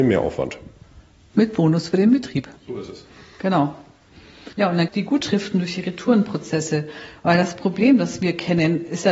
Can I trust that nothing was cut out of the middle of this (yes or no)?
no